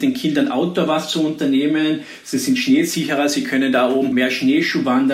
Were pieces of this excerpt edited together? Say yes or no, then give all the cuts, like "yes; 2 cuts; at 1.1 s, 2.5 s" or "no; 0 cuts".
no; 0 cuts